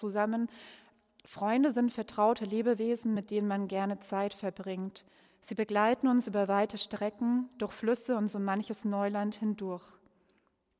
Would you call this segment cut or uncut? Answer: uncut